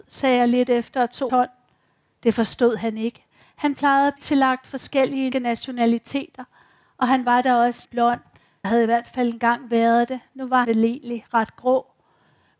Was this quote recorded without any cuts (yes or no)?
no